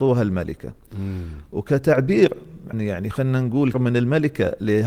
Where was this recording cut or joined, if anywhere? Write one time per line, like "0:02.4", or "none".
0:02.7
0:03.7

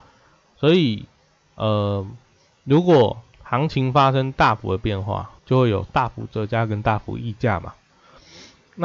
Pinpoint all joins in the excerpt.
0:03.3
0:05.4

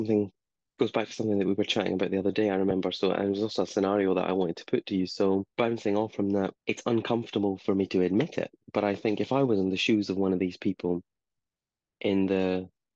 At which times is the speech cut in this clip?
0:05.5
0:06.6

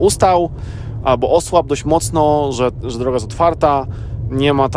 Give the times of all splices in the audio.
none

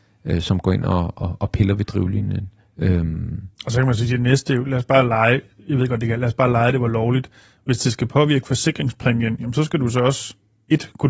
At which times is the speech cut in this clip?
none

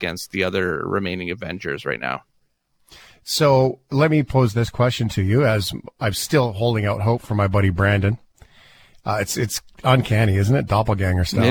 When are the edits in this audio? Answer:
none

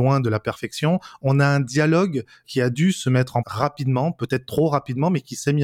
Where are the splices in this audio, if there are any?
0:03.4

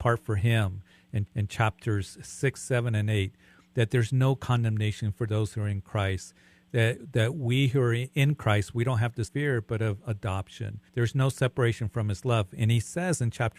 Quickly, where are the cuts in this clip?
0:01.3
0:09.3
0:10.9

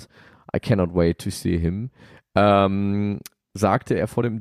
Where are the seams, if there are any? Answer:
none

